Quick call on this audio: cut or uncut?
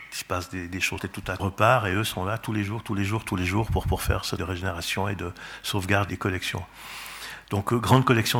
cut